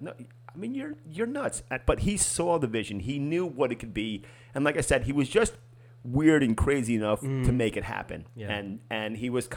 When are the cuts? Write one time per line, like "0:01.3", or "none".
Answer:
none